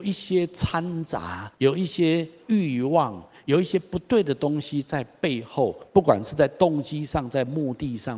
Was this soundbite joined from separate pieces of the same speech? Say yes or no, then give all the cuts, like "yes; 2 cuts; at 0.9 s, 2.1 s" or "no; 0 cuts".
yes; 1 cut; at 1.5 s